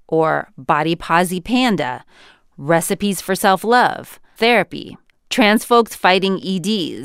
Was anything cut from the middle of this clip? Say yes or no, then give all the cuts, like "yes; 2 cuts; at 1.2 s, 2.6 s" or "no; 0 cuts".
yes; 1 cut; at 4.4 s